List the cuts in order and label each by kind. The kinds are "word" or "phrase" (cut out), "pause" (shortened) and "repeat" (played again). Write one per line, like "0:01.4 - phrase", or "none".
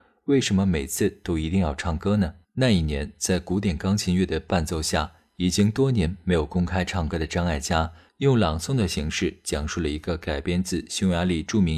0:02.4 - pause